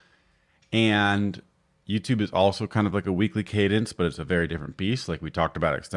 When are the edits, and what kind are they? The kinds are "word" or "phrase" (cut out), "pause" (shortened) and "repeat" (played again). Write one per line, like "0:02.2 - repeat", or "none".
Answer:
none